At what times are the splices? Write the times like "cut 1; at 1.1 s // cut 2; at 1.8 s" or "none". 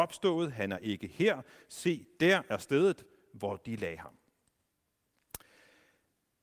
none